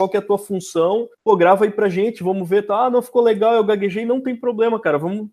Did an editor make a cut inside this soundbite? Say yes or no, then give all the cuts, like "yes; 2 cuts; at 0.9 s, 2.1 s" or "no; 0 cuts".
yes; 1 cut; at 1.1 s